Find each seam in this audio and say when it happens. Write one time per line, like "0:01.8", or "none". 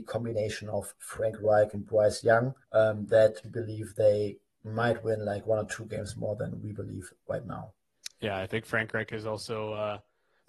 0:02.6
0:03.4